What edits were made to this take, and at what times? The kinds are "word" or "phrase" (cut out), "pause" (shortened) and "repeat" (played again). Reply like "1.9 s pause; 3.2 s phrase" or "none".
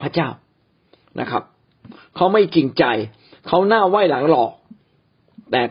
none